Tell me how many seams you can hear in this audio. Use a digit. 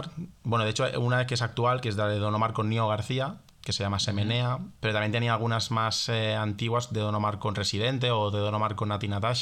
1